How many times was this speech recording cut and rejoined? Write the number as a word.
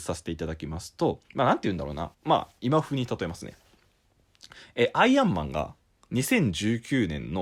two